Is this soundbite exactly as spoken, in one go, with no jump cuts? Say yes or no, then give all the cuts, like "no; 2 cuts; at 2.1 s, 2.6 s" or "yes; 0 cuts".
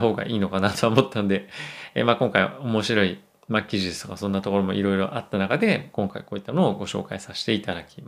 no; 1 cut; at 5.9 s